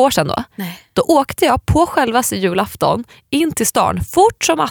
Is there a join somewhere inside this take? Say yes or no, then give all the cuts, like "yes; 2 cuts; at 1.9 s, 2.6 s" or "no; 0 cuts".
no; 0 cuts